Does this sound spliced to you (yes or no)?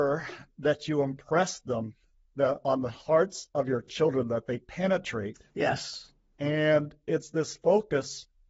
no